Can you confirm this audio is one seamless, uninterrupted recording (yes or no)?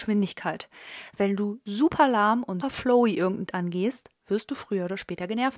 no